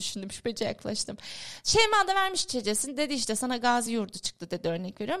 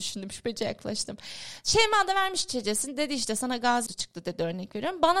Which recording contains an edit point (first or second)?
second